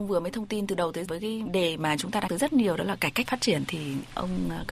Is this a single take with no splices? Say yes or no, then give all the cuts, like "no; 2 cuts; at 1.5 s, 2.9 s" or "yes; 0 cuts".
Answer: no; 4 cuts; at 1.1 s, 1.5 s, 2.3 s, 3.3 s